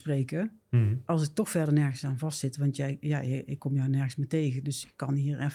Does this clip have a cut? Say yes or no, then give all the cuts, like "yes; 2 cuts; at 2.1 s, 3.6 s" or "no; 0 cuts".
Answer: no; 0 cuts